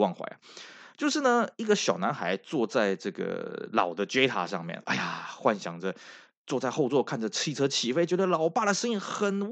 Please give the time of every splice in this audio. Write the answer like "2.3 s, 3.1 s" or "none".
none